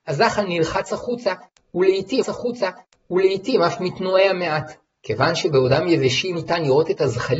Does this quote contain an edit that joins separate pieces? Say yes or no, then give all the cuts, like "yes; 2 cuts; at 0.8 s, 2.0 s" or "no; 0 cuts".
yes; 2 cuts; at 2.2 s, 6.3 s